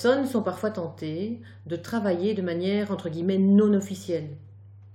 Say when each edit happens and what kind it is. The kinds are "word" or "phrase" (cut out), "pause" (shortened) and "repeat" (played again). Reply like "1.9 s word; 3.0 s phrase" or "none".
none